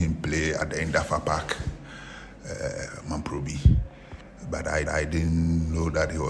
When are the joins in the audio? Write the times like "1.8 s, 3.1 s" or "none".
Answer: 4.8 s